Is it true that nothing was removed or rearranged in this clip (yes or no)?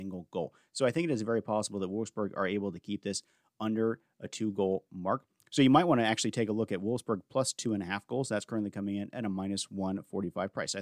yes